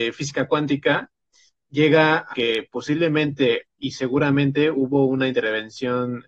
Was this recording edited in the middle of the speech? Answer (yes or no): yes